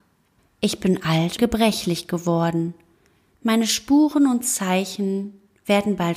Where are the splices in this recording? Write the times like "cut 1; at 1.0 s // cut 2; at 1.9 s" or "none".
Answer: cut 1; at 1.4 s